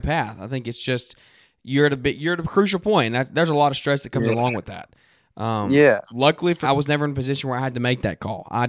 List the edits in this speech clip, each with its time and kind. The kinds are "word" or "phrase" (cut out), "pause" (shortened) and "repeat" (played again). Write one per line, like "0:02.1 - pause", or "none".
0:06.6 - word